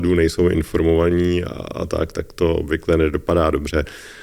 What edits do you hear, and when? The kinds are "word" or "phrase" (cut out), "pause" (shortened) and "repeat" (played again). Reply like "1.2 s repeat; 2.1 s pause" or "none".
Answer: none